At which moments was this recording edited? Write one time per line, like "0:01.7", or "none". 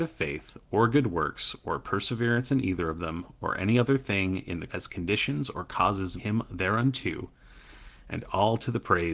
0:04.7
0:06.2